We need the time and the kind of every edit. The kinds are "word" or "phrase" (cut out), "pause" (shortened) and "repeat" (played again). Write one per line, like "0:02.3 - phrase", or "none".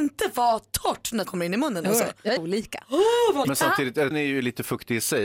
0:01.2 - word
0:02.4 - word
0:03.4 - word
0:04.1 - word

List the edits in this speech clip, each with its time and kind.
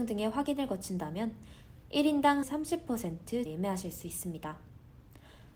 0:02.4 - phrase
0:03.5 - word

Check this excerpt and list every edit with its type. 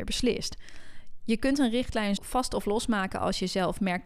0:02.2 - word

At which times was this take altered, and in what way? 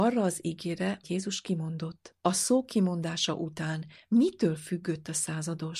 0:01.0 - word
0:02.2 - pause

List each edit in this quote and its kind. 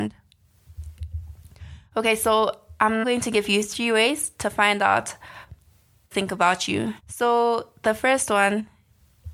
0:03.0 - word
0:06.1 - phrase
0:07.0 - pause

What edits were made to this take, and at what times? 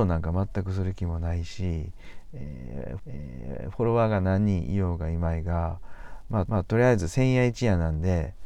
0:03.0 - repeat
0:06.5 - repeat

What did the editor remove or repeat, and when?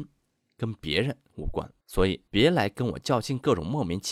0:01.8 - pause
0:02.3 - pause

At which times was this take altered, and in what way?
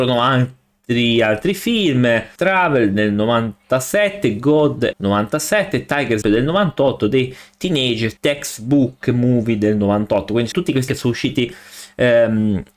0:02.4 - phrase
0:04.9 - phrase
0:06.2 - word
0:08.2 - pause
0:10.5 - word
0:10.9 - word

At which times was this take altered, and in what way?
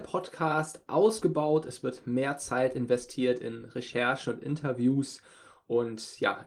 none

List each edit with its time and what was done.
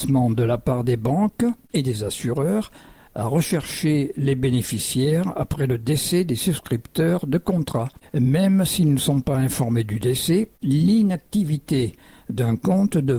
none

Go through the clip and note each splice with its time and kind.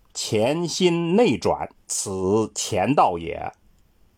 0:01.8 - pause

